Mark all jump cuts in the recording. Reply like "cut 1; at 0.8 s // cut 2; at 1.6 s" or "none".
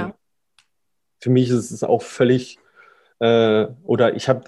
none